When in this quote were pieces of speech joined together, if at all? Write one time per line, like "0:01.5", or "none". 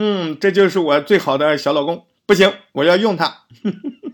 0:02.2